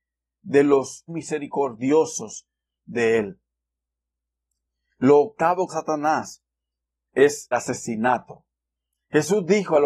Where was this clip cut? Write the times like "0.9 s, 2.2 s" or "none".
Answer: 1.1 s, 5.7 s, 7.5 s